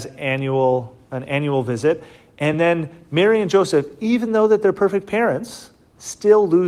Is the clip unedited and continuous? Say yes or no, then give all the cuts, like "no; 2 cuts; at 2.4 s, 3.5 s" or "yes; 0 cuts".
yes; 0 cuts